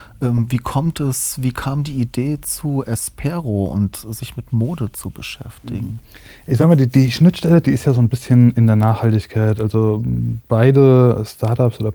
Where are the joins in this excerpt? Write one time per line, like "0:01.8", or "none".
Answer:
none